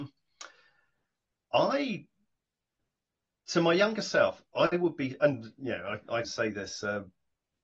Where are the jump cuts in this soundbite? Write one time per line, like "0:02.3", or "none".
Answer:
0:06.2